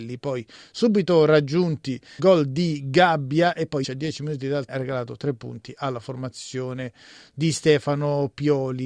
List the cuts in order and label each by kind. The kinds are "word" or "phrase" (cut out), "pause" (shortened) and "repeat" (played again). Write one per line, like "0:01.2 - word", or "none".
0:02.2 - word
0:03.8 - word
0:04.7 - word